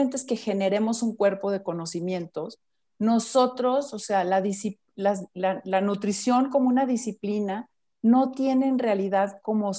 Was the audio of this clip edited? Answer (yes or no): no